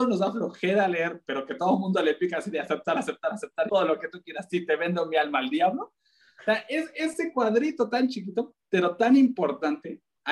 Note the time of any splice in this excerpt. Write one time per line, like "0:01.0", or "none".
0:03.7